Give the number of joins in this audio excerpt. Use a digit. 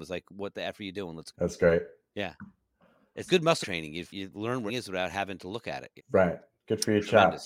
7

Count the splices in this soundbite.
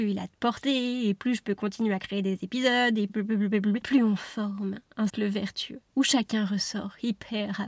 2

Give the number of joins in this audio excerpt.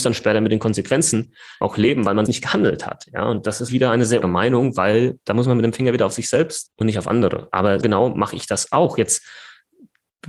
6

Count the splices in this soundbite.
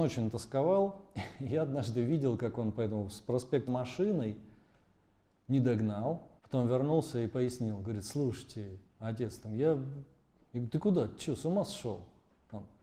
3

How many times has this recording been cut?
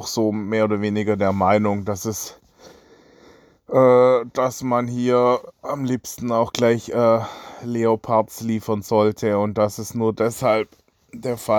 0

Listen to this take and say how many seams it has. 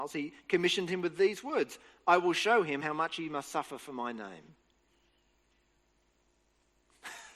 0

